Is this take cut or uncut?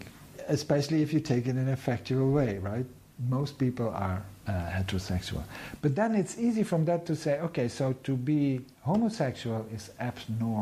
uncut